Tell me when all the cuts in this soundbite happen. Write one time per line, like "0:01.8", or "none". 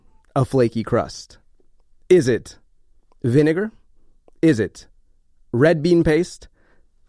none